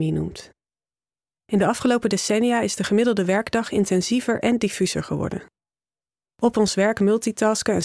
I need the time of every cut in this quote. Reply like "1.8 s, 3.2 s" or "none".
none